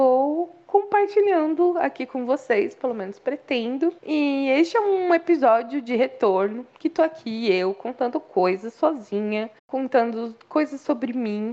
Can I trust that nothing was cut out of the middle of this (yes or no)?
no